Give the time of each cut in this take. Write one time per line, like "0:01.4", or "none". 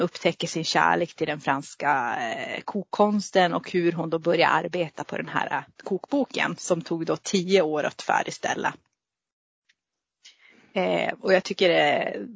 0:05.7